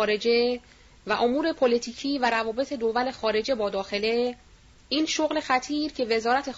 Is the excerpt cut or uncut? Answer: uncut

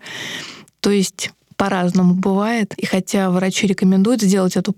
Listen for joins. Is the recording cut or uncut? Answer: uncut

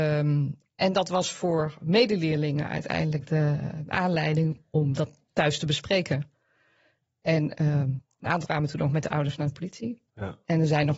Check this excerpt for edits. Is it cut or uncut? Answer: cut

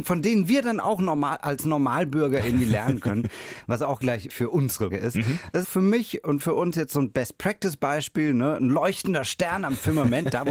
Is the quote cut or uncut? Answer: cut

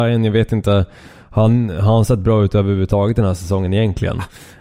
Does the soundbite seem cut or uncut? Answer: uncut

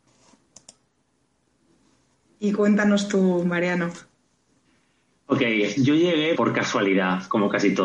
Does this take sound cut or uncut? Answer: cut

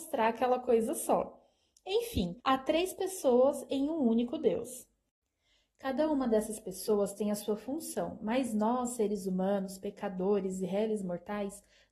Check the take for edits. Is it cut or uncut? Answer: cut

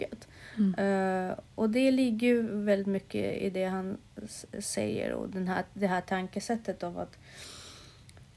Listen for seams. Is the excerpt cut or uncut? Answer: uncut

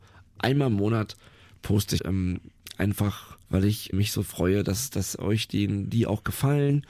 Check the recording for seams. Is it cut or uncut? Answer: cut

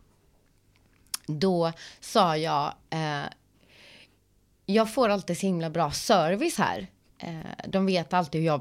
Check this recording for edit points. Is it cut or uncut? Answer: uncut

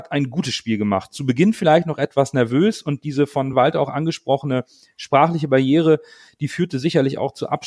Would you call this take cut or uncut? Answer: uncut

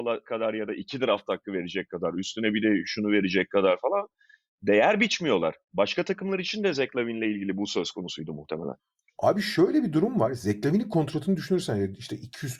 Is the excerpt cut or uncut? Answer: uncut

